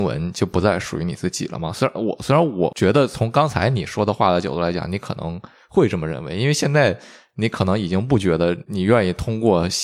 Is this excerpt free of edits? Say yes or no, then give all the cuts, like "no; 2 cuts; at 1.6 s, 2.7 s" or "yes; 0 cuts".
yes; 0 cuts